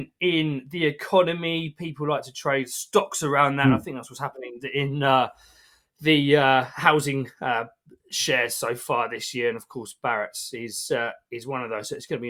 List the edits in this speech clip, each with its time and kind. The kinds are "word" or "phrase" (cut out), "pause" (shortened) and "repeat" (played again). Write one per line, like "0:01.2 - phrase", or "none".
none